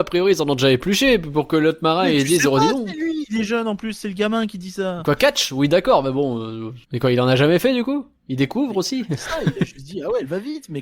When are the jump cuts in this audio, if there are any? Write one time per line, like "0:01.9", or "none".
0:06.8
0:08.2